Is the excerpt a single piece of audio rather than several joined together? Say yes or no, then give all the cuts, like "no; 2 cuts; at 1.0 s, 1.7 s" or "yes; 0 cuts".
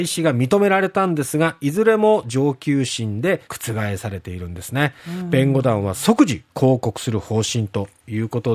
no; 1 cut; at 3.4 s